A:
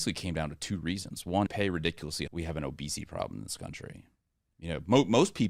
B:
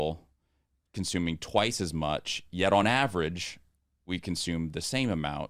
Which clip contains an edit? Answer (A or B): A